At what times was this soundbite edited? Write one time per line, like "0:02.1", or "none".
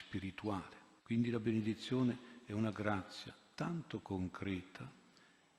0:01.0